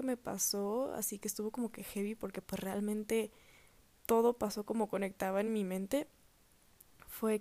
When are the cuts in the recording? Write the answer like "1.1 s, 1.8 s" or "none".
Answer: none